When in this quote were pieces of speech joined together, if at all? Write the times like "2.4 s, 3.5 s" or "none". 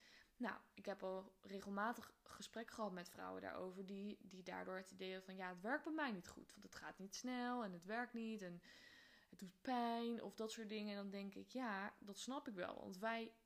none